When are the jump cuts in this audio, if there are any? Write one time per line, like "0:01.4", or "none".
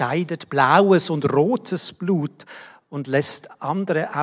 none